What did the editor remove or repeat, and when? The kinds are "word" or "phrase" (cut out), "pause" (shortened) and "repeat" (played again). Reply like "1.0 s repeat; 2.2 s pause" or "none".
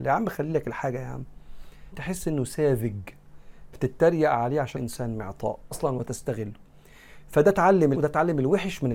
1.9 s phrase; 3.7 s word; 4.8 s word; 5.7 s word; 8.0 s phrase